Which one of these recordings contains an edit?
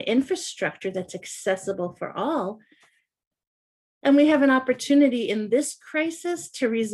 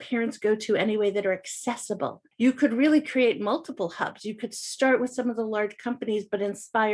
second; 1 cut; at 2.3 s

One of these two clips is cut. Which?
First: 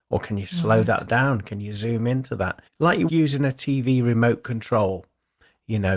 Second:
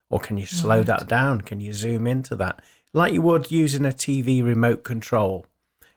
first; 2 cuts; at 2.7 s, 3.1 s

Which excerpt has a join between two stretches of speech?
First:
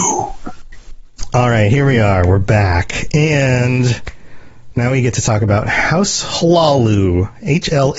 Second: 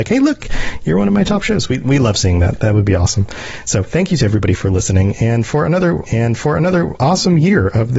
second; 1 cut; at 6.1 s

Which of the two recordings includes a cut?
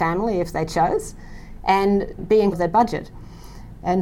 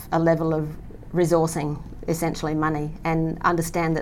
first; 2 cuts; at 2.2 s, 2.5 s

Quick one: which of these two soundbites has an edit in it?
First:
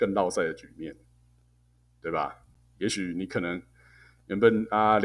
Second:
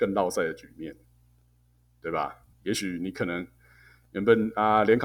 second; 1 cut; at 2.5 s

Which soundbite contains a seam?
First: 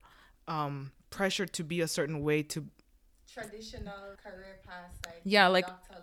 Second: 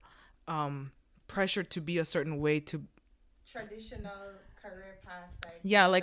first; 2 cuts; at 1.0 s, 4.2 s

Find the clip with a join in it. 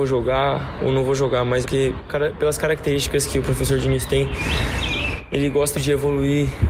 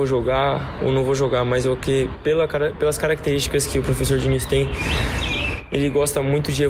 first; 3 cuts; at 1.6 s, 2.1 s, 5.7 s

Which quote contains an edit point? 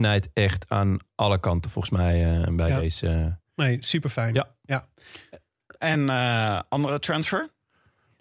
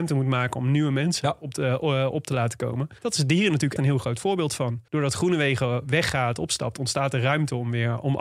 second; 4 cuts; at 3.0 s, 3.8 s, 4.2 s, 4.9 s

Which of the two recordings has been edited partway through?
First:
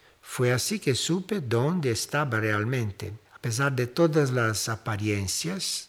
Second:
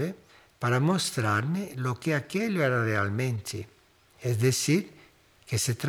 first; 1 cut; at 3.2 s

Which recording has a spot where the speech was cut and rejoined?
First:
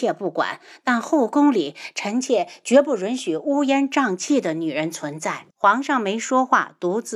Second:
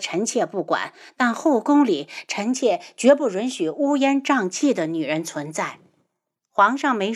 first; 1 cut; at 5.5 s

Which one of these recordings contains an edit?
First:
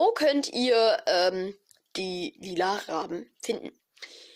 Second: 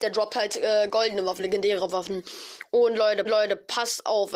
second; 2 cuts; at 1.4 s, 3.2 s

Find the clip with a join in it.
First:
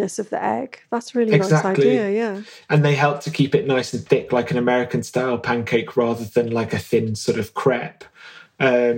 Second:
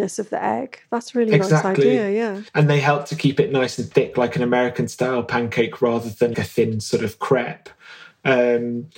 second; 2 cuts; at 2.5 s, 6.3 s

